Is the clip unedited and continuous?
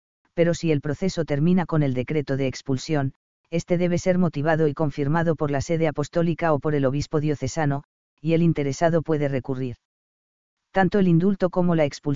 yes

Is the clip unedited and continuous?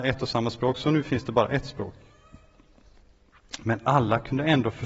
yes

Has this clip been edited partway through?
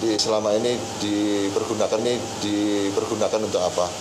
yes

